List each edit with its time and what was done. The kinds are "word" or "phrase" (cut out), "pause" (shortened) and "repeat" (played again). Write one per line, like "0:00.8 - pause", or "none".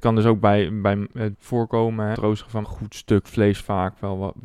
0:01.3 - word
0:02.1 - word
0:02.6 - phrase